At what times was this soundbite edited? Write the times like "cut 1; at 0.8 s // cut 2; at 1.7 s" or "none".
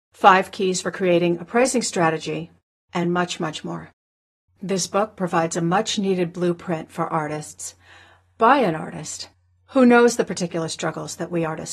none